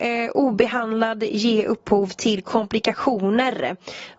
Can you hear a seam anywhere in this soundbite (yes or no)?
no